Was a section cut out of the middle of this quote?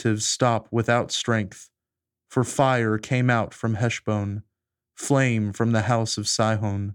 no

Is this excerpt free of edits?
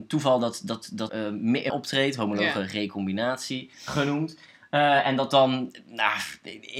no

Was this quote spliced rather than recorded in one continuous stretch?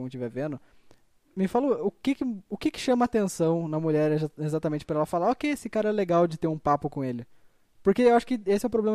no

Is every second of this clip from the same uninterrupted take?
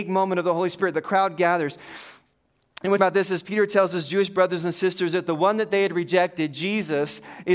no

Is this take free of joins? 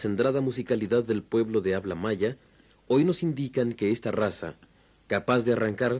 yes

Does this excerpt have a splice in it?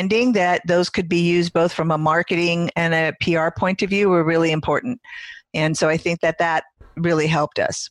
no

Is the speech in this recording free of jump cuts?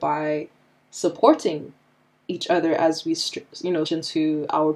no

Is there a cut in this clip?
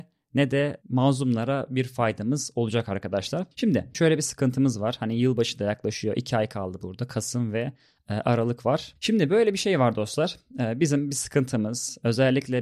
yes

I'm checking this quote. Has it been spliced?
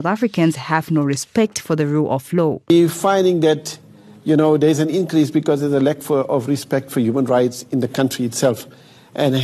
no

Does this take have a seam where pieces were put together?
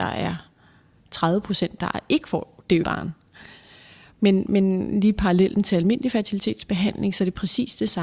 yes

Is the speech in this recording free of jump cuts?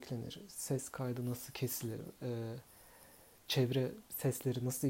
yes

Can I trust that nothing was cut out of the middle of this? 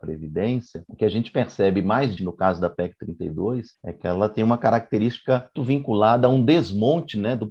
no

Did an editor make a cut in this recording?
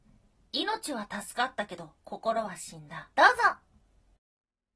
yes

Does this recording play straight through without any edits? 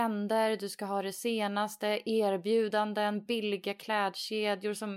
yes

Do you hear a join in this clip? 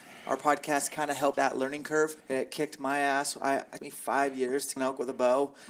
yes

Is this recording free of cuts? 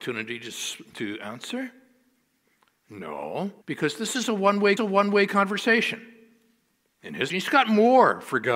no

